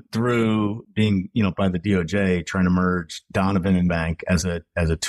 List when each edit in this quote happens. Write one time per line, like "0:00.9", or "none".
0:01.5
0:03.9